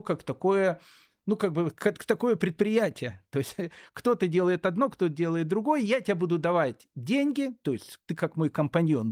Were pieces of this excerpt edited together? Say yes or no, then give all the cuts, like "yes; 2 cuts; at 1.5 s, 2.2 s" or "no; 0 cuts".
no; 0 cuts